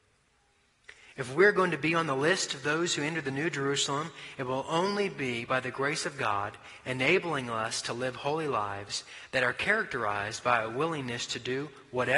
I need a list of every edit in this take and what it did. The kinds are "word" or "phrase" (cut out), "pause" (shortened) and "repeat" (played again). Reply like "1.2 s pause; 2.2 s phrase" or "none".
none